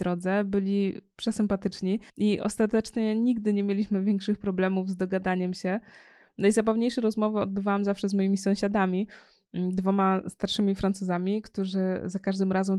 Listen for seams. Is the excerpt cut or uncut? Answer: cut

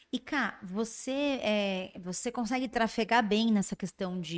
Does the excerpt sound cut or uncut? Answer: uncut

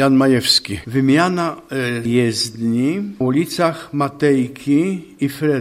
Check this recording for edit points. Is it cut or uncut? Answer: cut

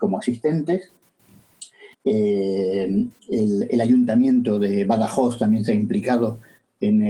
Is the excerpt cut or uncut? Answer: cut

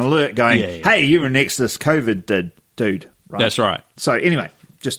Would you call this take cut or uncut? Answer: uncut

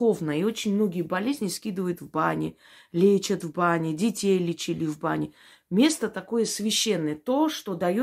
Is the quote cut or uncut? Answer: uncut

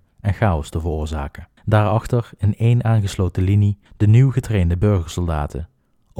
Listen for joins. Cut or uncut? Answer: cut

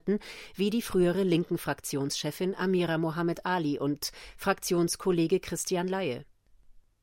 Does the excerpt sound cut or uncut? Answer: uncut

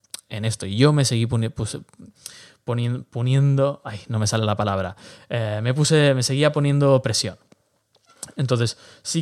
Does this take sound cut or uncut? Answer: uncut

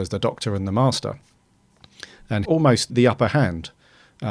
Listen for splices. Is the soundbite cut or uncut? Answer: cut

